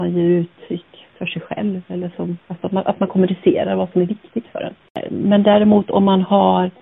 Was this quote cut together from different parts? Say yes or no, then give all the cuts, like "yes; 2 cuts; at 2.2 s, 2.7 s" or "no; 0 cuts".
yes; 1 cut; at 2.4 s